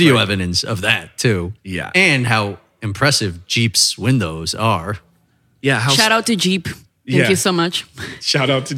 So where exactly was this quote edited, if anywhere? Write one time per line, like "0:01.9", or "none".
0:01.6